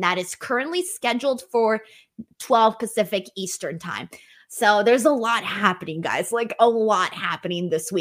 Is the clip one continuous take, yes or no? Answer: no